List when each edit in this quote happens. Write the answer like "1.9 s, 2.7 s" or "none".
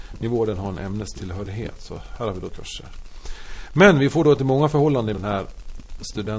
2.5 s, 4.4 s, 5.1 s